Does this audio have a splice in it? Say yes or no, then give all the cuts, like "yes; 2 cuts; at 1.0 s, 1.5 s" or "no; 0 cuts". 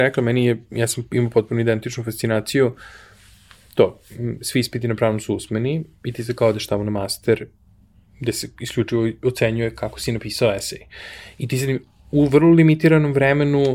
no; 0 cuts